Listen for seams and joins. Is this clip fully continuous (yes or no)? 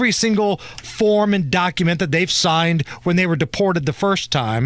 yes